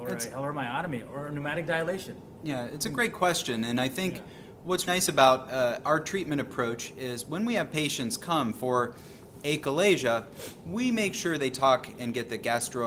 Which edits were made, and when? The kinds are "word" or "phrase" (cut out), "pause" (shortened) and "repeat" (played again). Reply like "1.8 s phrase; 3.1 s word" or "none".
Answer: 4.9 s word

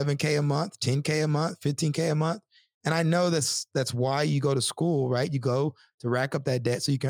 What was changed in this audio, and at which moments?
none

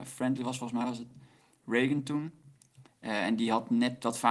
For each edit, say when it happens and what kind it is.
none

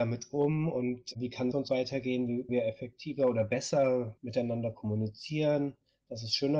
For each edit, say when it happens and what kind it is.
1.5 s phrase; 2.5 s word

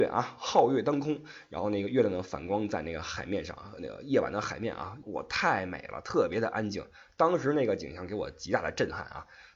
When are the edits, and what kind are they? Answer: 5.0 s phrase

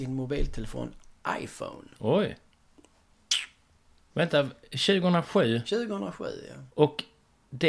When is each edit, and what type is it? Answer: 1.9 s pause; 6.7 s pause

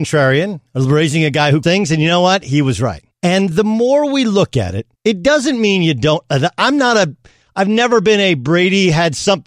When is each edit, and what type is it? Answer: 1.6 s word; 3.1 s pause; 5.0 s pause

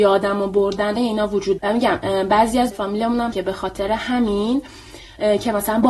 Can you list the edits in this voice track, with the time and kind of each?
1.0 s word; 1.6 s word; 2.7 s word; 3.3 s word

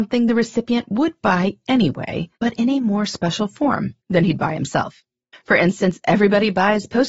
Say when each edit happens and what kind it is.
2.4 s pause; 4.0 s pause; 5.3 s pause

